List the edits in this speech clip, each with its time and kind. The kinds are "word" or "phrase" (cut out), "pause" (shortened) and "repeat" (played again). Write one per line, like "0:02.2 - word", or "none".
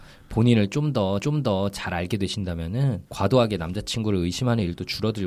0:01.2 - repeat
0:03.1 - pause